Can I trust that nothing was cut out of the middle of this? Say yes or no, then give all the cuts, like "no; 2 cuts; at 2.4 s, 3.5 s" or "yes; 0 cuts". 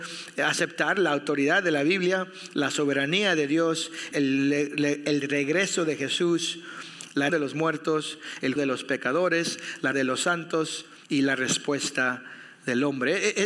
no; 5 cuts; at 4.1 s, 7.3 s, 8.6 s, 9.9 s, 11.0 s